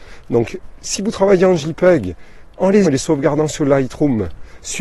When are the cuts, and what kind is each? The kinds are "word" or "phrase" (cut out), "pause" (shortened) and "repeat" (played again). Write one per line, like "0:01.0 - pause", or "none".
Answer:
0:02.8 - word

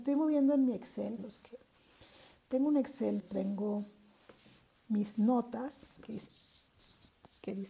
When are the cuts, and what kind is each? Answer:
0:01.2 - word
0:03.2 - word
0:06.0 - word

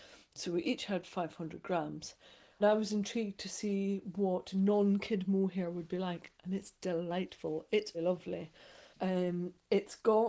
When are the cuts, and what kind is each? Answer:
0:02.6 - word
0:07.9 - word
0:08.9 - pause

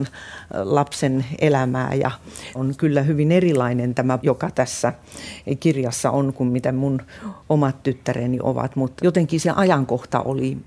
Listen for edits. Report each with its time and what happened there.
0:02.5 - word
0:04.2 - word
0:09.0 - word

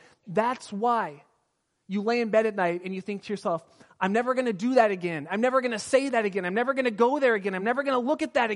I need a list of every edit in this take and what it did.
none

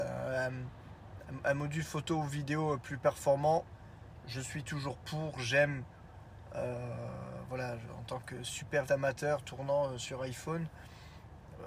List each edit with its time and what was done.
0:08.9 - word

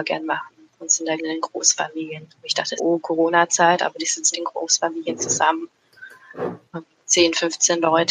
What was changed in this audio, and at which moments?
0:01.2 - word
0:02.8 - word
0:04.3 - word

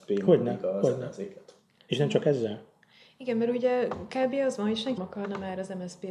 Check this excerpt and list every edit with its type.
0:05.0 - word

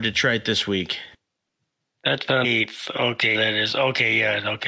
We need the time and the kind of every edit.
0:02.4 - word
0:03.3 - word

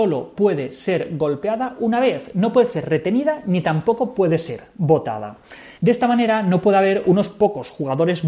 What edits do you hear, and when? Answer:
0:05.8 - pause

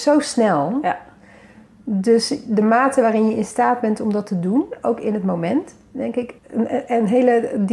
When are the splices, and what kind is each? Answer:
0:06.4 - word

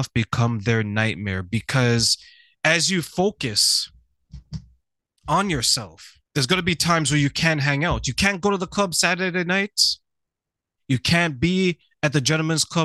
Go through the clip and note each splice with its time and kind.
0:06.3 - pause

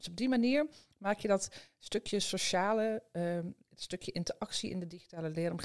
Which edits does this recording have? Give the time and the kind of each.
none

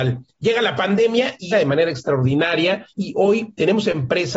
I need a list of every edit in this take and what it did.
0:01.5 - phrase
0:02.9 - pause

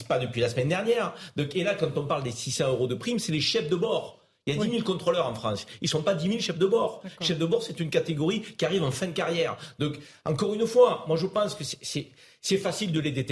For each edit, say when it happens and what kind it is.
none

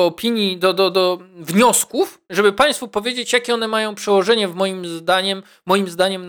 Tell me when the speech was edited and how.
0:02.2 - pause

